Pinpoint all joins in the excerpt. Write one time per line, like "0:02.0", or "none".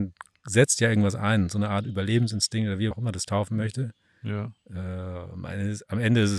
0:02.9